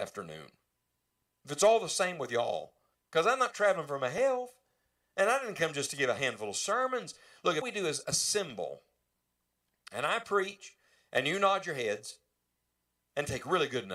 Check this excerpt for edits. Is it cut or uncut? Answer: cut